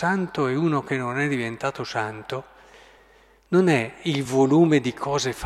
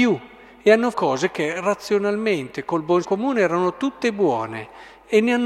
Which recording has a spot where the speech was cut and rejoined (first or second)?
second